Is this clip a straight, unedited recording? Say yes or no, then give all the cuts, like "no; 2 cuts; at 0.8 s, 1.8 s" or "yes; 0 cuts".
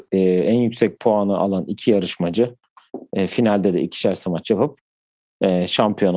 yes; 0 cuts